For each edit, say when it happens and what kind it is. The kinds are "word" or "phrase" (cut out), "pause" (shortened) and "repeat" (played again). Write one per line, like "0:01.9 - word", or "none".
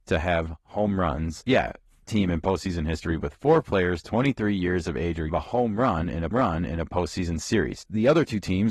0:02.0 - word
0:05.3 - phrase
0:06.3 - repeat